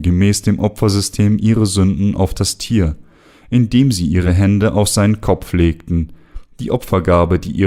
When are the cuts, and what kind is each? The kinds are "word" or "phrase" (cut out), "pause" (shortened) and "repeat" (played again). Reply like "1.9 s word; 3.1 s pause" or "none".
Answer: none